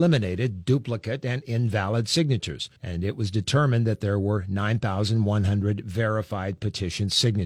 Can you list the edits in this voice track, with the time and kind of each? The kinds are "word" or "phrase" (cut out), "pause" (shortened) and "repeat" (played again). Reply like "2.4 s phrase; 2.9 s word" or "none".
2.8 s pause